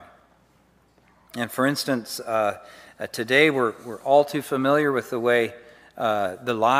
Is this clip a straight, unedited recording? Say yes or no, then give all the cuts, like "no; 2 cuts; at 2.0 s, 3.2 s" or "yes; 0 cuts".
yes; 0 cuts